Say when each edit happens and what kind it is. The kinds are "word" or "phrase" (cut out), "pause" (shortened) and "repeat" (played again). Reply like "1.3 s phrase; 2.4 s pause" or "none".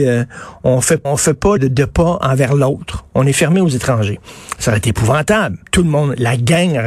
1.0 s word; 1.6 s word; 5.7 s pause